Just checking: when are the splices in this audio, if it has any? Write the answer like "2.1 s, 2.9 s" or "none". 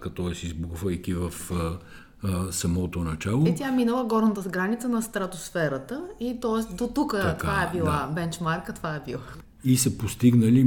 none

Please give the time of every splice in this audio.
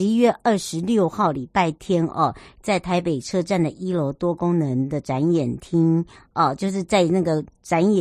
none

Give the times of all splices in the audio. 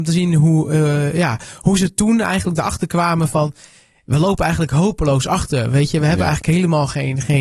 none

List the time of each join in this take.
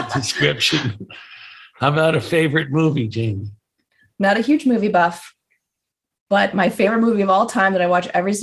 none

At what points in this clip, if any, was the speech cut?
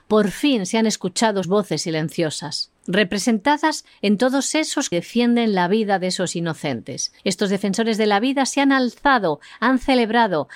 1.4 s, 2.8 s, 4.9 s, 7.2 s

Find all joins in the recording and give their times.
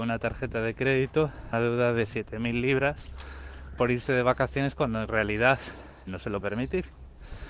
1.5 s, 6.1 s, 6.4 s

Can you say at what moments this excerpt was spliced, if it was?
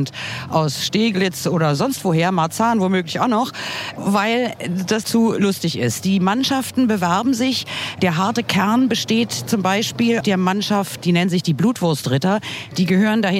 5.0 s, 10.2 s

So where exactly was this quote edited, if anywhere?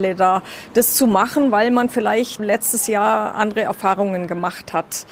2.4 s

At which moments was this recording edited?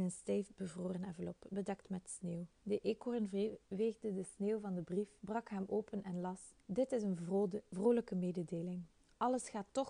2.5 s, 3.6 s, 5.2 s, 6.6 s

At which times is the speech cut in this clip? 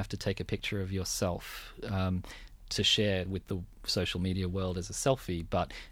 none

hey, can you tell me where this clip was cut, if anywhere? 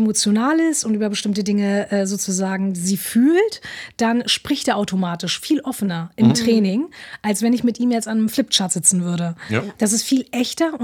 none

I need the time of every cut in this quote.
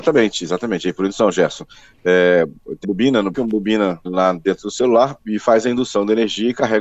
2.8 s, 3.3 s, 4.1 s, 5.2 s

